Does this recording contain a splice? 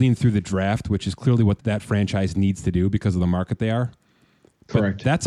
yes; 1 cut; at 1.6 s

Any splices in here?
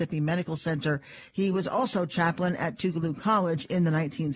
no; 0 cuts

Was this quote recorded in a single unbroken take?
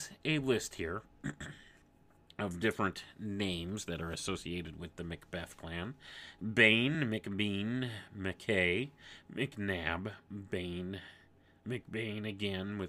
yes; 0 cuts

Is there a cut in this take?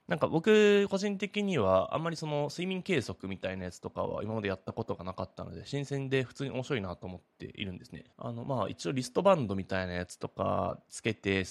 yes; 1 cut; at 8.1 s

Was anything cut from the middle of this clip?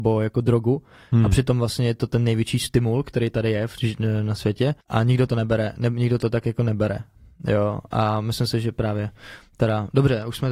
yes; 1 cut; at 4.8 s

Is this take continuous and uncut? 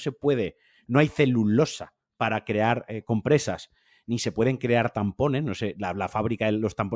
yes; 0 cuts

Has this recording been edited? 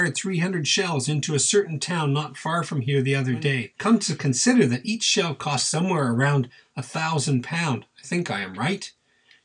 no; 0 cuts

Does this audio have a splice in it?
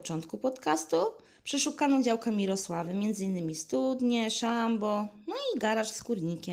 no; 0 cuts

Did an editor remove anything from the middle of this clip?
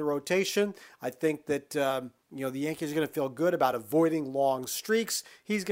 no; 0 cuts

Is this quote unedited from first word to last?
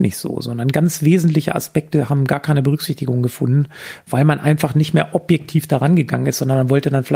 yes; 0 cuts

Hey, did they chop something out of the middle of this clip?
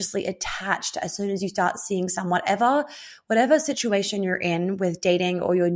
no; 0 cuts

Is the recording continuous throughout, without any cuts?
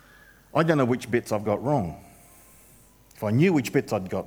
yes; 0 cuts

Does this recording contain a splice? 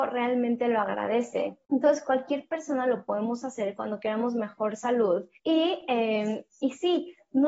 yes; 2 cuts; at 1.6 s, 5.4 s

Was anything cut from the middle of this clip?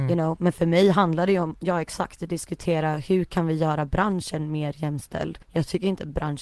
yes; 1 cut; at 5.4 s

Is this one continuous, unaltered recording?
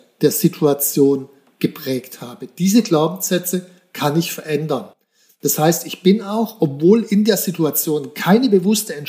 yes; 0 cuts

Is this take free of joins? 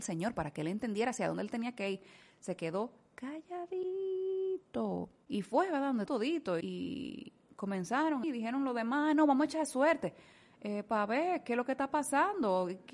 no; 3 cuts; at 6.1 s, 6.6 s, 8.2 s

